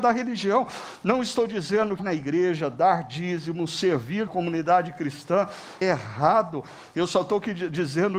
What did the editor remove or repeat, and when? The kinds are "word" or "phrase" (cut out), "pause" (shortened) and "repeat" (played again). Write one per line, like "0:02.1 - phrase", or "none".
0:02.0 - word
0:04.3 - word
0:05.8 - word